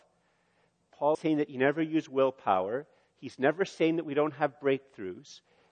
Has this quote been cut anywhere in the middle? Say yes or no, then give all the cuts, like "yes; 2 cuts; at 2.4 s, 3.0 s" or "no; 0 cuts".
yes; 1 cut; at 1.1 s